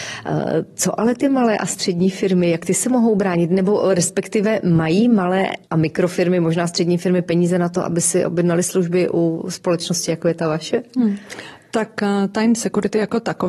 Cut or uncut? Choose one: cut